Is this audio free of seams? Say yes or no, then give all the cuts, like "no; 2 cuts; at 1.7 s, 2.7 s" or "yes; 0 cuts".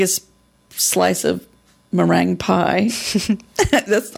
yes; 0 cuts